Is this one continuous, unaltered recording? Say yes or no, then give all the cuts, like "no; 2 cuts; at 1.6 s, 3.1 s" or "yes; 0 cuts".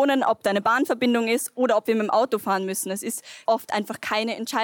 no; 1 cut; at 3.5 s